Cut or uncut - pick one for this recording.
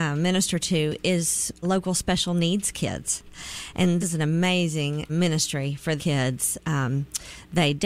cut